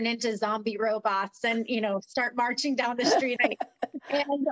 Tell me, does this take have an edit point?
yes; 1 cut; at 3.4 s

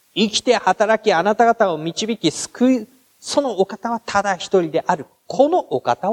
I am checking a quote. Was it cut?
no; 0 cuts

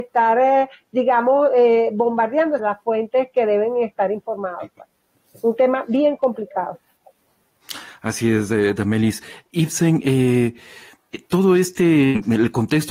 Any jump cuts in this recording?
yes; 1 cut; at 2.6 s

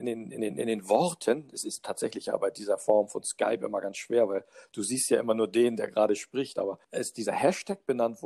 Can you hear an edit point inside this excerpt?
yes; 1 cut; at 6.8 s

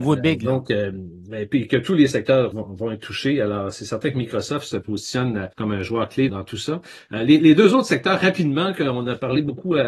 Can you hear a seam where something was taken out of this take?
yes; 3 cuts; at 2.5 s, 5.5 s, 6.3 s

